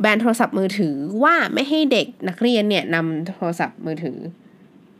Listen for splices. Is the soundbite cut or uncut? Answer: cut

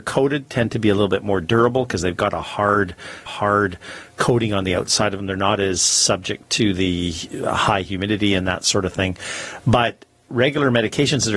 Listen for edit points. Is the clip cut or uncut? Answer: cut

